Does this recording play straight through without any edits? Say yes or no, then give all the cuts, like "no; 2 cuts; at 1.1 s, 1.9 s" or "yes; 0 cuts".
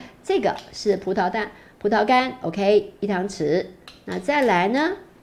yes; 0 cuts